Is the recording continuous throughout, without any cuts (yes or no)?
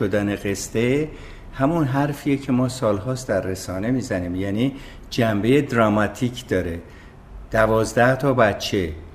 yes